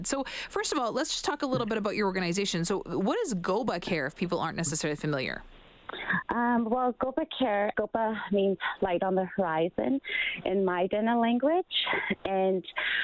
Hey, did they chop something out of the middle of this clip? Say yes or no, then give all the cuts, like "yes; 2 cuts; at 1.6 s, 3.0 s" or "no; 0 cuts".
yes; 1 cut; at 7.7 s